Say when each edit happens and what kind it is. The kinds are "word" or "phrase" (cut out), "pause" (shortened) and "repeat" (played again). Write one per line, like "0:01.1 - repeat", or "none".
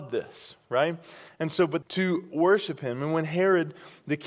0:01.8 - phrase